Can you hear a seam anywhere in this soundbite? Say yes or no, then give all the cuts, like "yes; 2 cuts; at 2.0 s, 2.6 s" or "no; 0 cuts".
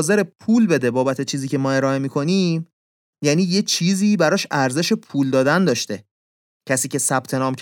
no; 0 cuts